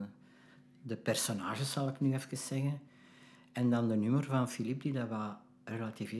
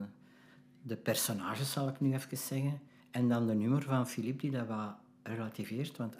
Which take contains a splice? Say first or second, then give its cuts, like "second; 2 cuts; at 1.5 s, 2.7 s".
second; 1 cut; at 3.0 s